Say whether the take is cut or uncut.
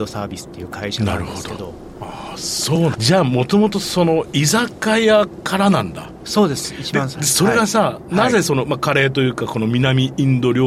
cut